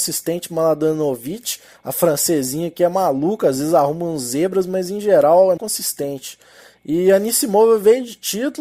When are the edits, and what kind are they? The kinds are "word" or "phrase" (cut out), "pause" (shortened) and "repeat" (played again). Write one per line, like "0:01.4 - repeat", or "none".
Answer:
0:05.6 - word

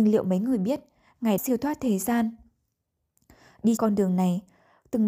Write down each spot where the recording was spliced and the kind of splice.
0:01.4 - word
0:03.8 - word

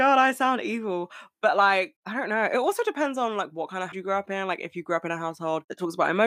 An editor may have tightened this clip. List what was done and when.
0:03.9 - word

